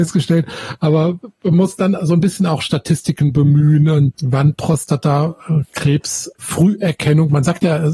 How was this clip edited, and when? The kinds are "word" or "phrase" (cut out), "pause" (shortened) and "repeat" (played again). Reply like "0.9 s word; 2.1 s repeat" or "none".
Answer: 4.1 s word; 6.3 s pause